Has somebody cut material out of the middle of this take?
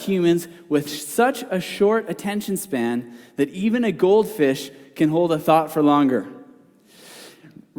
no; 0 cuts

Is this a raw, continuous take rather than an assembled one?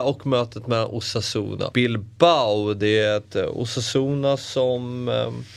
no; 1 cut; at 1.7 s

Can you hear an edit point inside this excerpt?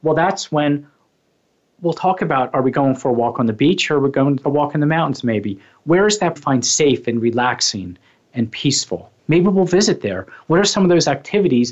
yes; 3 cuts; at 4.4 s, 6.4 s, 9.2 s

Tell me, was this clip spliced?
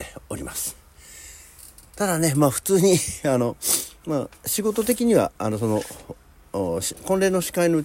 no; 0 cuts

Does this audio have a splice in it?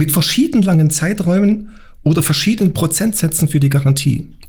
no; 0 cuts

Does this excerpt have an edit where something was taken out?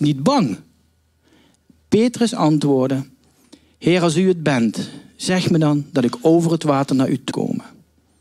yes; 1 cut; at 7.3 s

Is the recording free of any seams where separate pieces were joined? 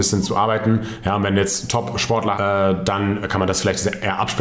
no; 1 cut; at 2.3 s

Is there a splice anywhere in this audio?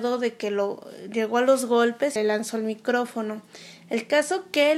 yes; 1 cut; at 2.2 s

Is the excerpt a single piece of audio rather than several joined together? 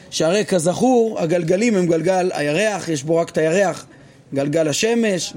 yes; 0 cuts

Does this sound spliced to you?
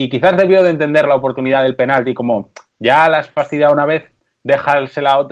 no; 0 cuts

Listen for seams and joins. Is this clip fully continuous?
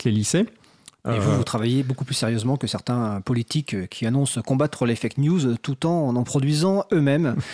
yes; 0 cuts

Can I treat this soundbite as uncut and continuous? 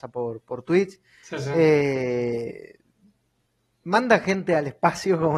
yes; 0 cuts

